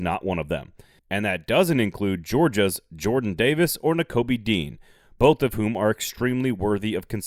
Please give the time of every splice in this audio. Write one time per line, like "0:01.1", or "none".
none